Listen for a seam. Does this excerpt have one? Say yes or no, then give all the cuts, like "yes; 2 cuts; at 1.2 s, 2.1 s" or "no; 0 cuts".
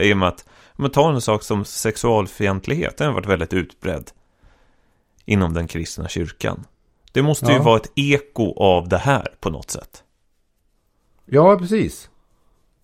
no; 0 cuts